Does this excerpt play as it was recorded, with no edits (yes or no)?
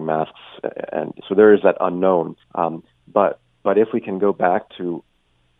no